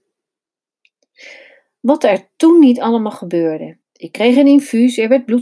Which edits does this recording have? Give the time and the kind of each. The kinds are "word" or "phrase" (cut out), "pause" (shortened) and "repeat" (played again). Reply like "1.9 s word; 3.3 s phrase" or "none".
3.8 s pause